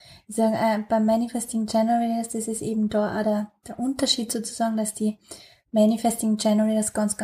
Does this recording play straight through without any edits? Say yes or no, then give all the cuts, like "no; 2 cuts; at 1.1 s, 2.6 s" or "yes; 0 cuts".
yes; 0 cuts